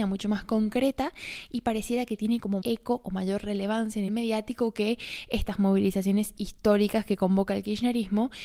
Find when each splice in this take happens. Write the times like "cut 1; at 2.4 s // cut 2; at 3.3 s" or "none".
cut 1; at 2.6 s // cut 2; at 4.1 s